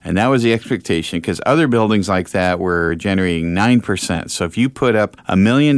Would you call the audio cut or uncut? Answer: uncut